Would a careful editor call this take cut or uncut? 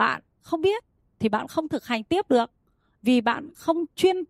uncut